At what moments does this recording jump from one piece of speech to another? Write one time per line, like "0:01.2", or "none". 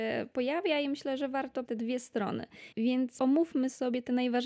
0:01.6
0:03.2